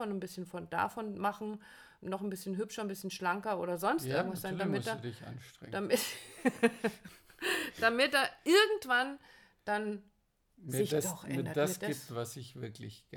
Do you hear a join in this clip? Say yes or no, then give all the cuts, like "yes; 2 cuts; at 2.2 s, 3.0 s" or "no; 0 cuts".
no; 0 cuts